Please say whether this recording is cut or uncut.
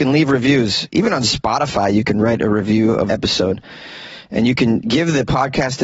cut